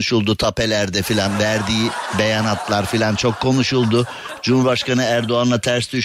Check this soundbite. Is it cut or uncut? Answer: uncut